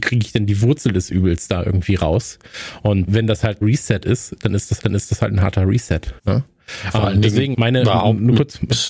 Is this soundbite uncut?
no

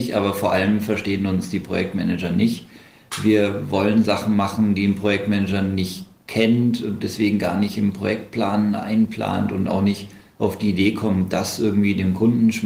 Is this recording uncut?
yes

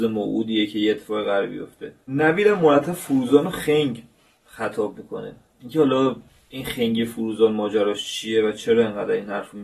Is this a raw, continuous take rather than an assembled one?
yes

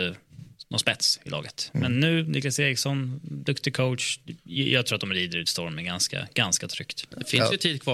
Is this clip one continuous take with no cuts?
yes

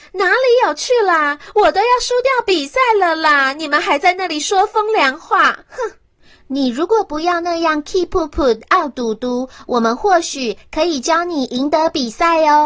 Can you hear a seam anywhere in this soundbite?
no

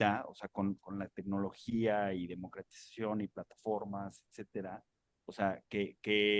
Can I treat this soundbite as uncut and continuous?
yes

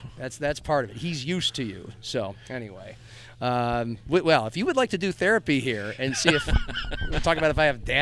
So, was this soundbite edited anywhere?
no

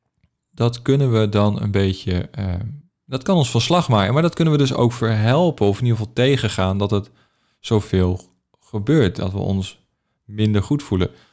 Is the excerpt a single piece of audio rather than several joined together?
yes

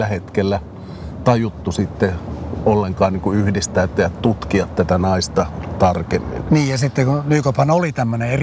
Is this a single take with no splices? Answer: yes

